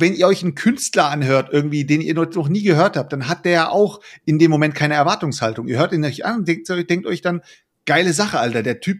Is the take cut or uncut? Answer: uncut